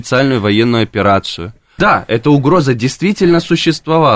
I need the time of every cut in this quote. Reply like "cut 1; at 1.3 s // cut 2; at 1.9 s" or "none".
cut 1; at 1.8 s